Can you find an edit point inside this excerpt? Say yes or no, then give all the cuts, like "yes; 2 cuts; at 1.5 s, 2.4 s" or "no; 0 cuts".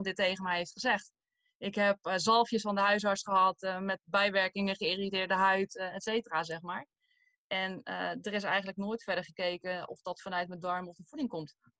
no; 0 cuts